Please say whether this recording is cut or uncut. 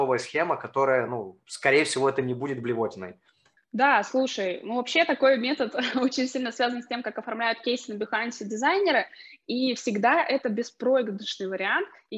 uncut